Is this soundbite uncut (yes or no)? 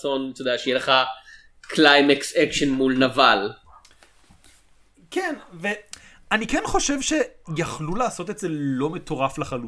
yes